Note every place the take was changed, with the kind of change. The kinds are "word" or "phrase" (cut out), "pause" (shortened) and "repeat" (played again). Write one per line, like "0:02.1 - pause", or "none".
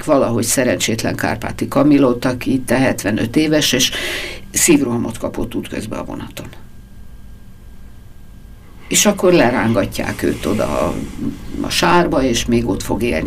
none